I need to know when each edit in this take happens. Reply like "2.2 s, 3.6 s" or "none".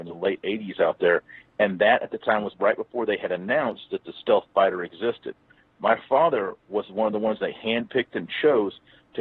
none